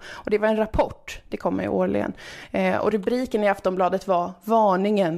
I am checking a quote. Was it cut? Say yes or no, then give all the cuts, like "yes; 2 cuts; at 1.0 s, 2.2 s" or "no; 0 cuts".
no; 0 cuts